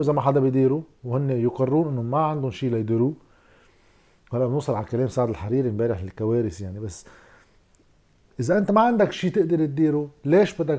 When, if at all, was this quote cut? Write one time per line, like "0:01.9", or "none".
none